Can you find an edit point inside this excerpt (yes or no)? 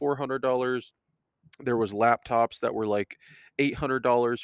no